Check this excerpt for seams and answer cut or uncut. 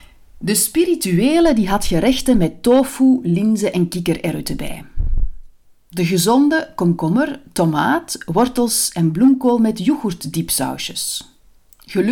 uncut